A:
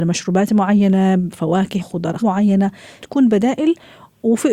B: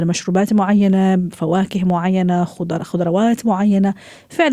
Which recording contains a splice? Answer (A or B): A